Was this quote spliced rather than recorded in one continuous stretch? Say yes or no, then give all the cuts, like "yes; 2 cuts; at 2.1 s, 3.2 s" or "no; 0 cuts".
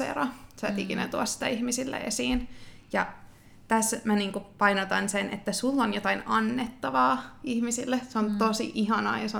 no; 0 cuts